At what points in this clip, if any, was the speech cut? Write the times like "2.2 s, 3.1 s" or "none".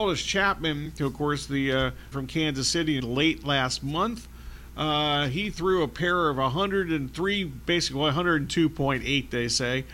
2.1 s, 3.0 s